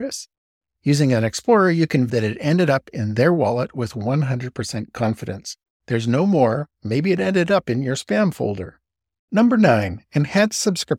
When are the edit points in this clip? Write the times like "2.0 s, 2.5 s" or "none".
2.1 s